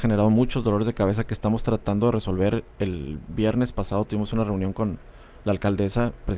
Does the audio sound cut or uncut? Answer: uncut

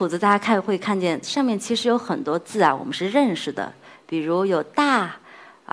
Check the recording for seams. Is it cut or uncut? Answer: uncut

